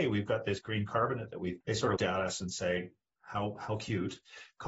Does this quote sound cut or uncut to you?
cut